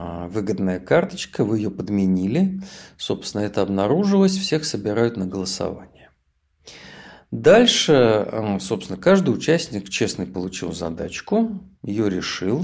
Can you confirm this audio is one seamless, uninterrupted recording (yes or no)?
yes